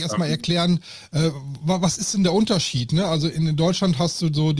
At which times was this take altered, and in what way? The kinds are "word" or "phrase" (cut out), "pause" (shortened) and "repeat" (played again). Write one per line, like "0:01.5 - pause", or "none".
none